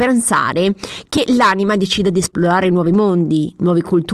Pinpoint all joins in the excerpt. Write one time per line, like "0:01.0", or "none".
none